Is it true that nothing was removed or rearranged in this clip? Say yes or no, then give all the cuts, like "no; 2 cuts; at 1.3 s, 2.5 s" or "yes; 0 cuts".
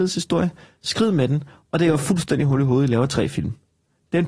yes; 0 cuts